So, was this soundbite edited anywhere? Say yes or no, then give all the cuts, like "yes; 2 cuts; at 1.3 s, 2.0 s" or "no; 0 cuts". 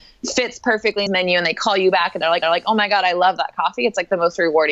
yes; 2 cuts; at 1.1 s, 2.4 s